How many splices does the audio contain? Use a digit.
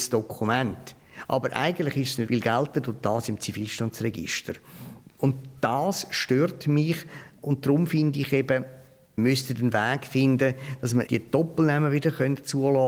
4